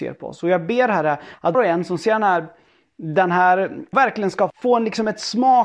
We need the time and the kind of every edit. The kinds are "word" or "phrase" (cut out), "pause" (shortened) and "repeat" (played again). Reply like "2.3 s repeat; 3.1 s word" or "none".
1.5 s word; 3.9 s word; 4.5 s word